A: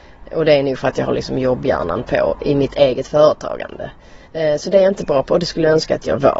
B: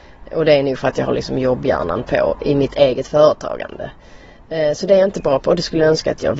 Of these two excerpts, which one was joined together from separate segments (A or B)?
A